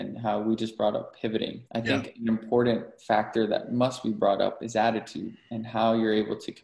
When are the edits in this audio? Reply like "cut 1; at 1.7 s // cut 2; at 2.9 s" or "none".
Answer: cut 1; at 1.6 s

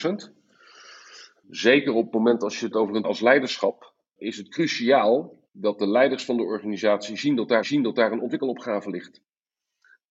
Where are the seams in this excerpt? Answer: cut 1; at 2.7 s // cut 2; at 3.0 s // cut 3; at 5.5 s // cut 4; at 7.6 s

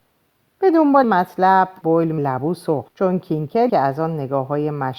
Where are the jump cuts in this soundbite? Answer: cut 1; at 1.0 s // cut 2; at 1.8 s // cut 3; at 2.2 s // cut 4; at 2.9 s // cut 5; at 3.7 s

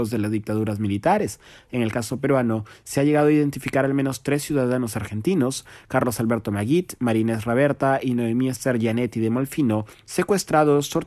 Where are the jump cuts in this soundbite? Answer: none

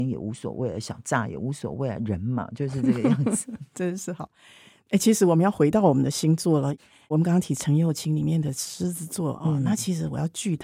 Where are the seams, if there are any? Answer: none

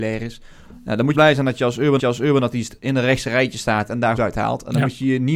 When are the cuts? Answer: cut 1; at 1.1 s // cut 2; at 2.0 s // cut 3; at 4.2 s

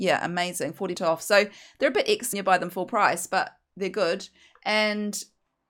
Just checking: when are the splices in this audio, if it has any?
cut 1; at 0.9 s // cut 2; at 2.3 s

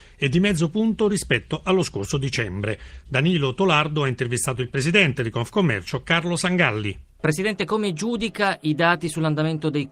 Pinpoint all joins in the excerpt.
none

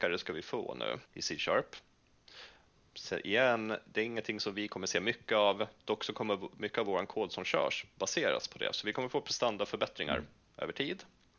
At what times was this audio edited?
cut 1; at 1.1 s

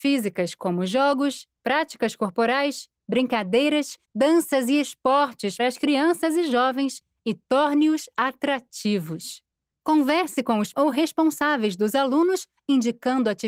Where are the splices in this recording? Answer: cut 1; at 4.0 s // cut 2; at 5.6 s // cut 3; at 9.5 s // cut 4; at 10.7 s

